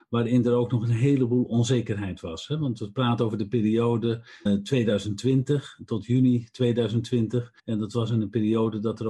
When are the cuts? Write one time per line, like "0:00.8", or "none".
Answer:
0:04.5
0:07.6